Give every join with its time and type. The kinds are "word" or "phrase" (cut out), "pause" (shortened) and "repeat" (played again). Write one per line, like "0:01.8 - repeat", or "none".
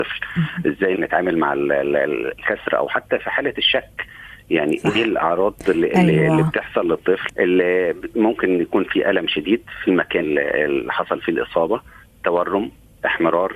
0:00.9 - word
0:07.3 - word
0:10.2 - word